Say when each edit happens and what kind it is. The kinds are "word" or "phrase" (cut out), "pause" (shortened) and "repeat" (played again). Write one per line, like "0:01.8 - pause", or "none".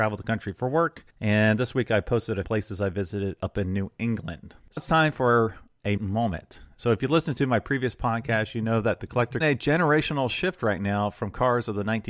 0:01.1 - pause
0:02.4 - phrase
0:04.8 - word
0:06.0 - word
0:09.4 - phrase